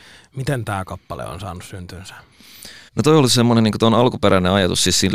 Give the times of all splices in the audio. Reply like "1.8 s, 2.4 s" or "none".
2.9 s

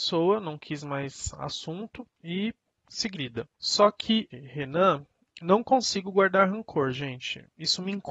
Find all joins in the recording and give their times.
2.1 s, 3.1 s, 3.5 s, 4.3 s

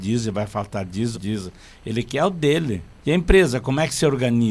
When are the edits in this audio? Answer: 1.1 s, 3.0 s

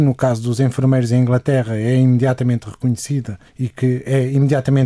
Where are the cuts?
3.5 s

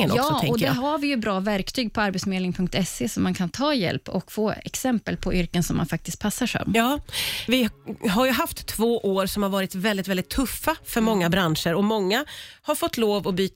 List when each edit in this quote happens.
none

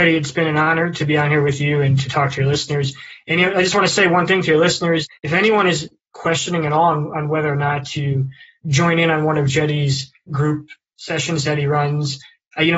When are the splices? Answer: 5.2 s

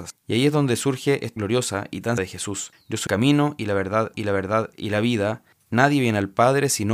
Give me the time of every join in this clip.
1.4 s, 2.2 s, 3.1 s, 4.1 s

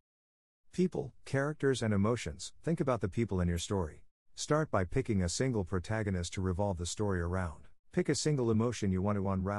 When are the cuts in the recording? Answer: 4.2 s, 7.8 s

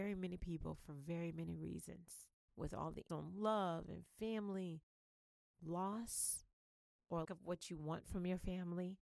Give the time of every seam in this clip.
3.1 s, 7.2 s

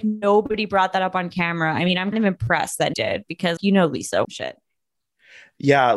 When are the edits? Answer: 2.1 s, 2.9 s, 3.6 s, 4.2 s

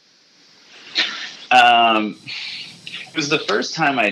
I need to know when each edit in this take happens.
1.5 s, 3.1 s

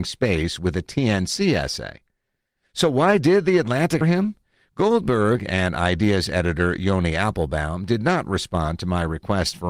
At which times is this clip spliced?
4.0 s

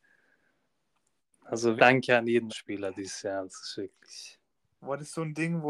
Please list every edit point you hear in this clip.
1.8 s, 2.5 s

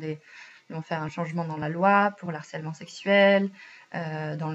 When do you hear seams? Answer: none

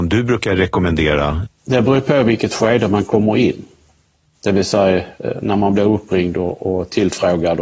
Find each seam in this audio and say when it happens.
none

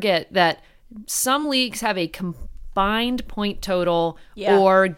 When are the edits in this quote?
none

